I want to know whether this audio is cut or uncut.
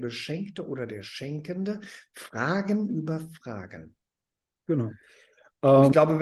uncut